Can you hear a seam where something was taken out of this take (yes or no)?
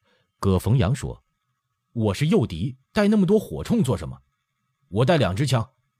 yes